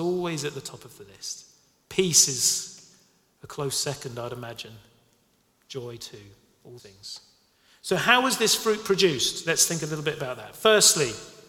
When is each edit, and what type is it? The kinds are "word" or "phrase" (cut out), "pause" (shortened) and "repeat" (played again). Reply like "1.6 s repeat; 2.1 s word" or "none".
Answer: 6.8 s word